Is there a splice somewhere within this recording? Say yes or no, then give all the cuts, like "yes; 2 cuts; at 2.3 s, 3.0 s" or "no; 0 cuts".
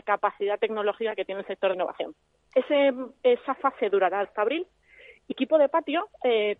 yes; 3 cuts; at 1.7 s, 4.2 s, 5.3 s